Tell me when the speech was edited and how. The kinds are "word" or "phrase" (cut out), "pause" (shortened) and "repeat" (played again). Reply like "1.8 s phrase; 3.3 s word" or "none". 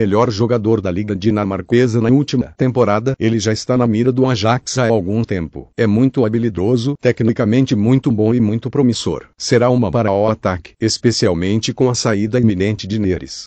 9.9 s phrase